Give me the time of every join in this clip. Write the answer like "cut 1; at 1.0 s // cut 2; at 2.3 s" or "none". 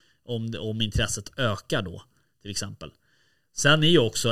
none